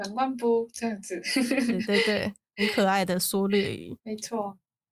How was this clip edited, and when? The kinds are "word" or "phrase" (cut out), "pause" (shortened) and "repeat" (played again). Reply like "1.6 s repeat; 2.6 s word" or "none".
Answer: 4.0 s pause